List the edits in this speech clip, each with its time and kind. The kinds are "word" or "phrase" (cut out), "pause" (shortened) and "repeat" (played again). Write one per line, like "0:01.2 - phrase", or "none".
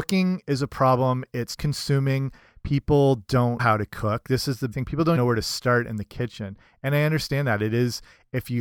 0:01.6 - word
0:03.6 - word
0:04.7 - word
0:05.2 - word